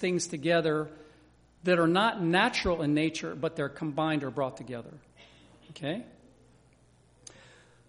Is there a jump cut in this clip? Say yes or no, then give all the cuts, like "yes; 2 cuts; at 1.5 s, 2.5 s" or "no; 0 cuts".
no; 0 cuts